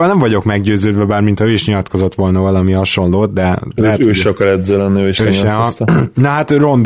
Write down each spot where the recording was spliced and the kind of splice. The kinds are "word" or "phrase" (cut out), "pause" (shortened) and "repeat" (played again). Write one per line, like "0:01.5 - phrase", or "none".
none